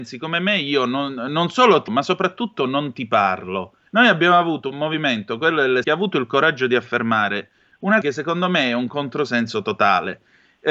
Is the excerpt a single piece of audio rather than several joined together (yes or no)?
no